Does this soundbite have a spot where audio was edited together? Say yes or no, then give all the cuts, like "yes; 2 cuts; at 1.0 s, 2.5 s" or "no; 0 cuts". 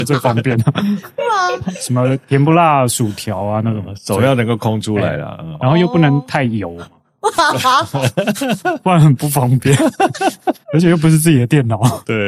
yes; 1 cut; at 10.6 s